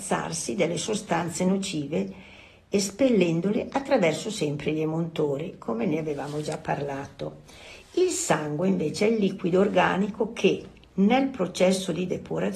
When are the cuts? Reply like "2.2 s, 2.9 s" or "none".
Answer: none